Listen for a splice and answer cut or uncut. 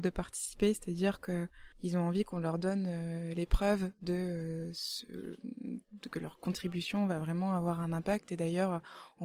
cut